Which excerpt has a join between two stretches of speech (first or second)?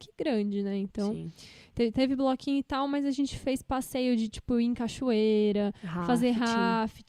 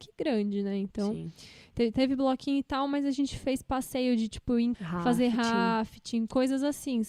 second